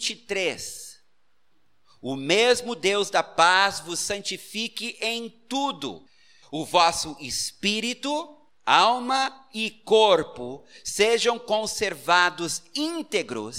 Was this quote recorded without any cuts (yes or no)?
yes